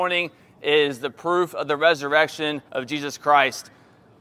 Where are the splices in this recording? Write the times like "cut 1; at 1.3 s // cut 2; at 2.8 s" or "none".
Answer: cut 1; at 2.7 s